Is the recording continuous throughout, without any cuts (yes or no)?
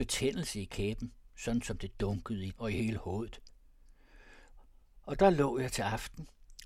no